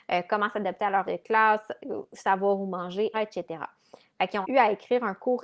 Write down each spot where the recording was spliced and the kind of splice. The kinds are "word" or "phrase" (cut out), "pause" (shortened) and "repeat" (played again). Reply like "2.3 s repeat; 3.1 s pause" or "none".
1.0 s word; 3.1 s word; 4.4 s word